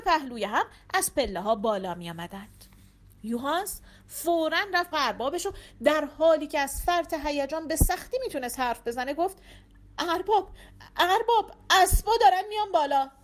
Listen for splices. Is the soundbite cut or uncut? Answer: cut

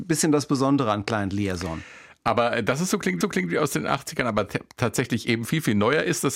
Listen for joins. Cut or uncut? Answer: cut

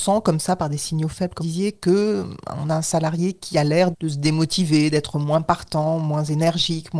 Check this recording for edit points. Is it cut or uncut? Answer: cut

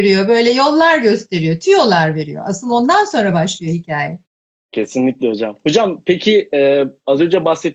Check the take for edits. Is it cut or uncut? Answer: uncut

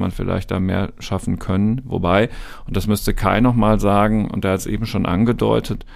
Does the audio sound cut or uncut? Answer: uncut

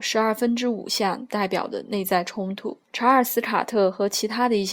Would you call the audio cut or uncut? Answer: cut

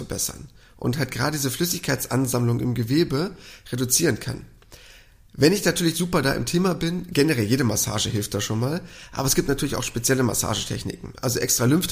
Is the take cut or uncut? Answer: uncut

